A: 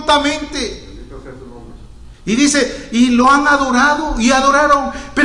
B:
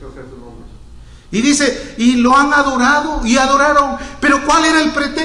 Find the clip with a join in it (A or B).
A